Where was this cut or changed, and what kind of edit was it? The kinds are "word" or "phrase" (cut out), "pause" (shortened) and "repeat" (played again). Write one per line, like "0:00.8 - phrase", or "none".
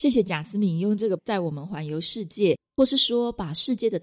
0:01.2 - word